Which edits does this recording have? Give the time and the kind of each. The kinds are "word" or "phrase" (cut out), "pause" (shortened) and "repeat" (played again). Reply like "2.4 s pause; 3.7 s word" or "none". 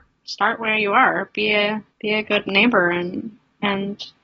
1.9 s pause